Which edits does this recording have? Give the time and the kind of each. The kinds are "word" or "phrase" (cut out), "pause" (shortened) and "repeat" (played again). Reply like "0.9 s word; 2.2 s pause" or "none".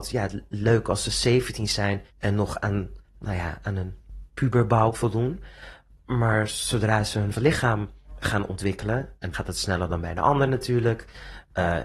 2.1 s pause; 3.0 s pause; 4.9 s word; 7.4 s word; 9.3 s phrase